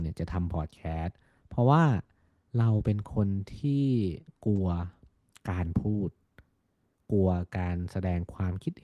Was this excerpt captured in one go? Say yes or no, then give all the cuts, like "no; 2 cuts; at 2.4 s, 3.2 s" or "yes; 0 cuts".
yes; 0 cuts